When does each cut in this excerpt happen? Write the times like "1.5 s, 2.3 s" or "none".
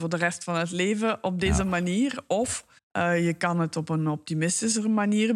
2.8 s